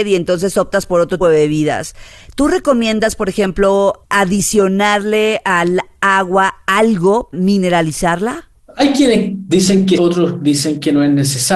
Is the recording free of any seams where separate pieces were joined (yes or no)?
no